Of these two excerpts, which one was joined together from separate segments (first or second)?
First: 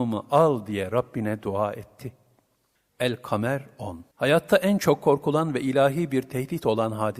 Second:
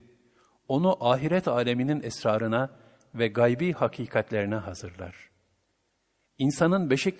first